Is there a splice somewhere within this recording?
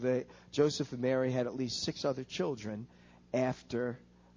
no; 0 cuts

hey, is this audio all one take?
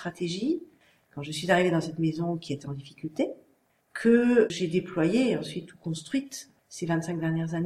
yes; 0 cuts

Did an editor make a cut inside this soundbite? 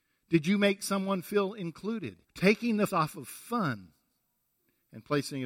yes; 2 cuts; at 2.2 s, 2.9 s

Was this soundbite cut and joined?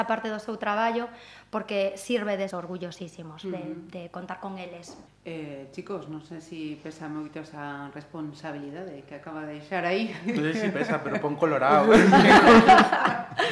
yes; 2 cuts; at 2.5 s, 5.1 s

